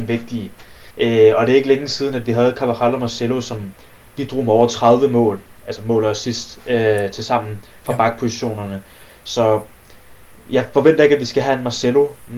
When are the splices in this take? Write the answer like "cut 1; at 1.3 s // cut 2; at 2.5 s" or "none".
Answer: cut 1; at 0.9 s